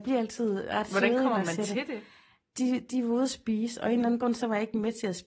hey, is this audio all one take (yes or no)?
yes